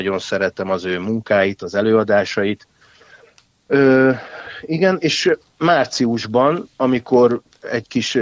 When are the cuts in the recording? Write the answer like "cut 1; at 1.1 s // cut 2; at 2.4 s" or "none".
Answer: none